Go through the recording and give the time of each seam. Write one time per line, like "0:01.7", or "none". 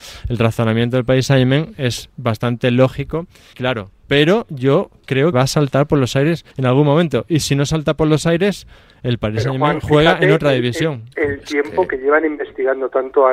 0:03.5
0:05.3
0:06.5